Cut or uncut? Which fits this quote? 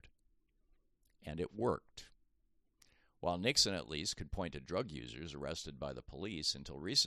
uncut